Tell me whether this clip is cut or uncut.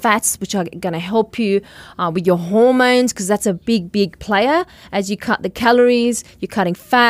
uncut